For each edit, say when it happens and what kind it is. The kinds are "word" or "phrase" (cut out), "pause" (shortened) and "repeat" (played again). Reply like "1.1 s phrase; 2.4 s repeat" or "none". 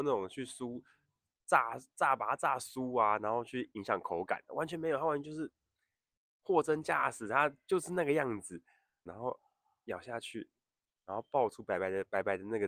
9.1 s phrase